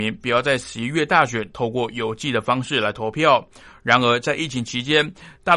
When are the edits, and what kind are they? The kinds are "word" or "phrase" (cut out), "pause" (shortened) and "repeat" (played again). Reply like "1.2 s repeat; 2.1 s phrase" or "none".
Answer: none